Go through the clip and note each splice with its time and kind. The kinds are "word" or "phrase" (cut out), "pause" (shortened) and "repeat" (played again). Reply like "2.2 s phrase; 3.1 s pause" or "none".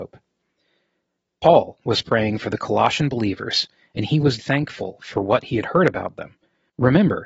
4.4 s word